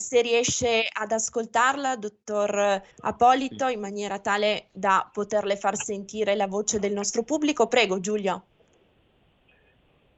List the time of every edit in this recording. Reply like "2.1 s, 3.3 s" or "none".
2.9 s